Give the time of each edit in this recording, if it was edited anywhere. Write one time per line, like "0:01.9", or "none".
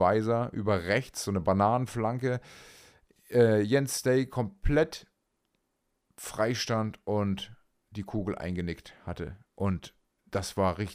none